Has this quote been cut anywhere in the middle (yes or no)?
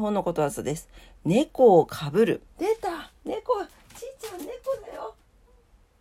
yes